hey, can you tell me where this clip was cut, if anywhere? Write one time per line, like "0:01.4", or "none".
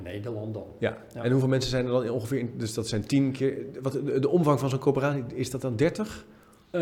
none